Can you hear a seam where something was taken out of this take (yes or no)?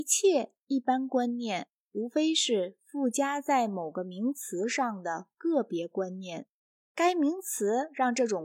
no